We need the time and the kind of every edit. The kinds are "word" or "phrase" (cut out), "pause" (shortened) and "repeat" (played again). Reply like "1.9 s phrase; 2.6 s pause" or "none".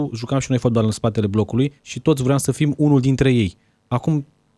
1.8 s pause